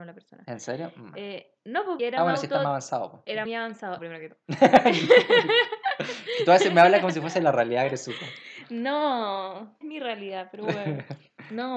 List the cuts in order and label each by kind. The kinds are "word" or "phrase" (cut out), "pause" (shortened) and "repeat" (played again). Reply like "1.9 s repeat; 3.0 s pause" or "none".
2.0 s word; 3.5 s word; 4.0 s phrase; 9.8 s word

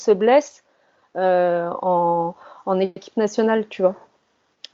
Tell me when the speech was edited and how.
none

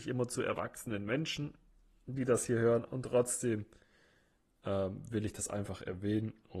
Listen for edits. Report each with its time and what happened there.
none

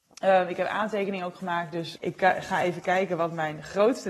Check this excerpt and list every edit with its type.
2.0 s word

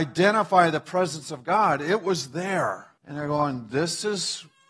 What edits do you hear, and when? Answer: 3.0 s pause

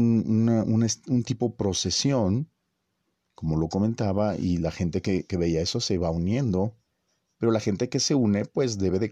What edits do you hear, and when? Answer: none

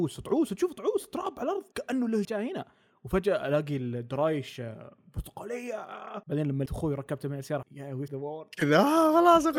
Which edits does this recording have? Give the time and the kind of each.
1.7 s pause; 2.2 s phrase; 6.2 s pause; 6.7 s word; 7.6 s word; 8.1 s word

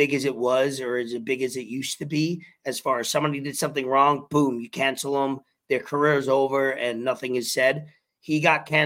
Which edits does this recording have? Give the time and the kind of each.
none

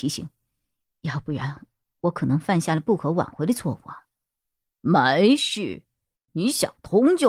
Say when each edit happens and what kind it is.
none

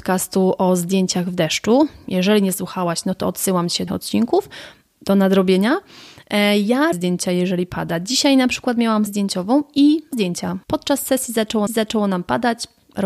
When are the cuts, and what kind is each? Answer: 3.9 s phrase; 6.9 s word; 9.1 s word; 10.1 s word; 10.6 s pause; 11.7 s repeat

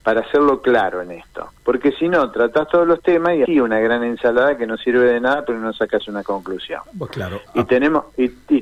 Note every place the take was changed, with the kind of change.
1.6 s pause; 3.4 s word; 6.9 s pause

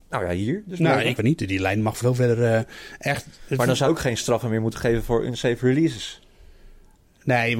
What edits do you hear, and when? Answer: 1.2 s word; 2.0 s word; 3.9 s word

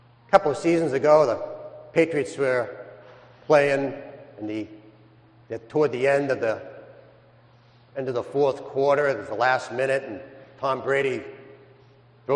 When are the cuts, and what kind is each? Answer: none

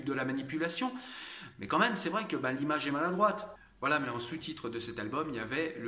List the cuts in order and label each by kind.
none

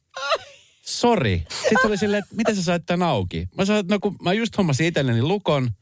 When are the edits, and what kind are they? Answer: none

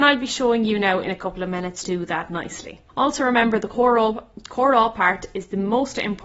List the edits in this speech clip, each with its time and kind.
1.8 s phrase; 2.9 s pause

